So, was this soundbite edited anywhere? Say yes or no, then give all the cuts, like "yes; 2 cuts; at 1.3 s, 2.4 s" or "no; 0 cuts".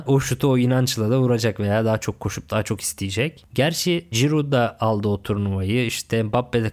yes; 1 cut; at 4.1 s